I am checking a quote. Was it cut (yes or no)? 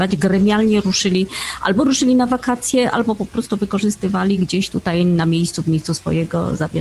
no